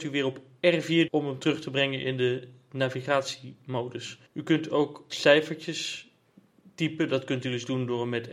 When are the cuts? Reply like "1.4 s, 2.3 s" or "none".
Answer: 1.1 s, 4.3 s, 5.1 s

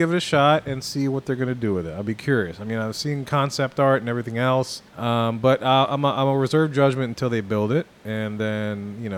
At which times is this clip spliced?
4.9 s

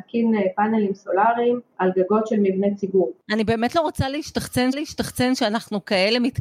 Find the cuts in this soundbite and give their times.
4.7 s

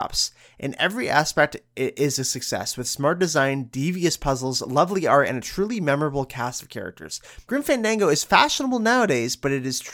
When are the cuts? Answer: none

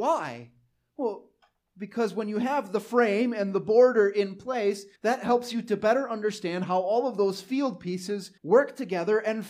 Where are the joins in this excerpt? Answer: 5.0 s, 8.4 s

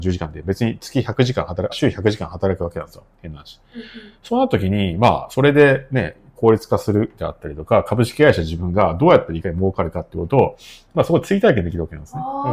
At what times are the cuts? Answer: 1.7 s

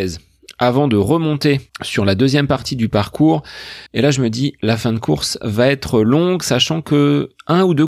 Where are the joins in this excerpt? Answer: 1.7 s, 3.9 s

